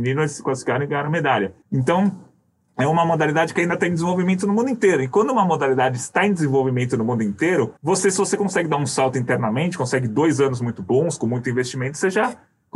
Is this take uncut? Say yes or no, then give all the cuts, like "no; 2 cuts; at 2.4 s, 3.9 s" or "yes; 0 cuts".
no; 2 cuts; at 1.6 s, 7.8 s